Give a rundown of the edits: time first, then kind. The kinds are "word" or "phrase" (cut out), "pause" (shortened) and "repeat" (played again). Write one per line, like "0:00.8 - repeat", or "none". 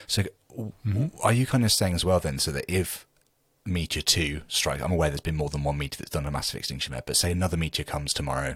none